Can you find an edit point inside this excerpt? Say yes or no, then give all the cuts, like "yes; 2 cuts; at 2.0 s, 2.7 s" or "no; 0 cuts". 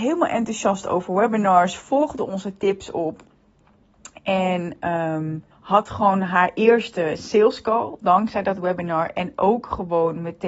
yes; 1 cut; at 5.5 s